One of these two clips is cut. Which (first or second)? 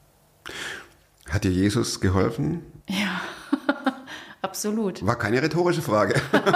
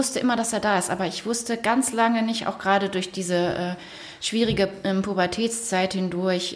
first